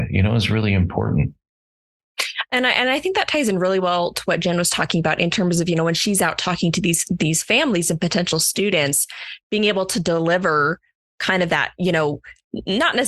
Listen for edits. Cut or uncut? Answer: uncut